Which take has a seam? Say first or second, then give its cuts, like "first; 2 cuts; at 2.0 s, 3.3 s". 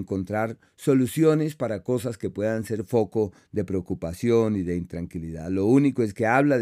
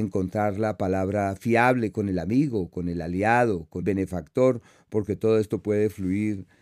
second; 1 cut; at 3.8 s